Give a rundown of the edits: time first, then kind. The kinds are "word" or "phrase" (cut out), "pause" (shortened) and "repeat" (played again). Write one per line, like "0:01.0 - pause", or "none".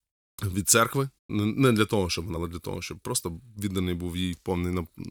0:01.2 - pause
0:02.4 - phrase